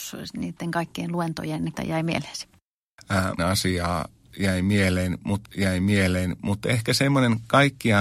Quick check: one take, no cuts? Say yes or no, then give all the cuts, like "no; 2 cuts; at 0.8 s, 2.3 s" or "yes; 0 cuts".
no; 3 cuts; at 1.8 s, 3.4 s, 5.4 s